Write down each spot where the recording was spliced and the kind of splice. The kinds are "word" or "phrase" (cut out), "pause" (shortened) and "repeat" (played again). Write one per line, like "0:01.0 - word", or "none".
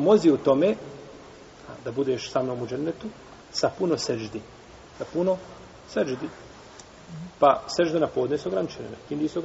0:03.4 - pause